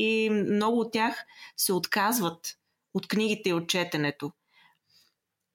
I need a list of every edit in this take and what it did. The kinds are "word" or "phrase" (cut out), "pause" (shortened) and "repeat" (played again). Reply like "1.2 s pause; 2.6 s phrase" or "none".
none